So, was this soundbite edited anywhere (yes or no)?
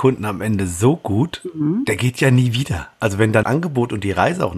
yes